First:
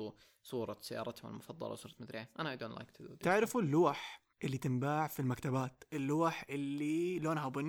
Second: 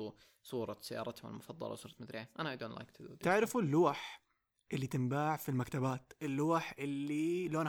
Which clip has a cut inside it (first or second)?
first